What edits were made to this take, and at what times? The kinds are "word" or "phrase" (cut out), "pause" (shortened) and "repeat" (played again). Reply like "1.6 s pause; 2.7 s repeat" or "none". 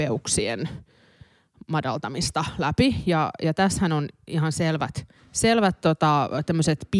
5.2 s pause